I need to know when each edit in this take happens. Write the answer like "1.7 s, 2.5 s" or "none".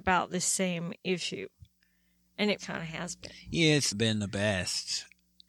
2.6 s, 3.9 s